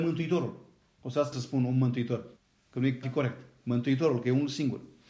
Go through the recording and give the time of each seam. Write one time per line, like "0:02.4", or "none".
0:01.3
0:02.4
0:03.0